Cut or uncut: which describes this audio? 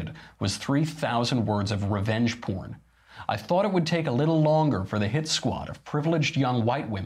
uncut